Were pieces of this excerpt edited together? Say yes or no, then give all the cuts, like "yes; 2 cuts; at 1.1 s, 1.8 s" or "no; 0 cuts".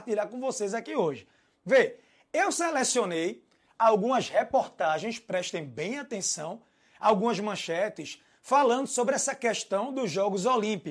no; 0 cuts